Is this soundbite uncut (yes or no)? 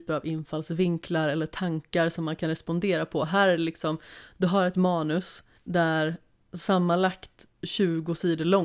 no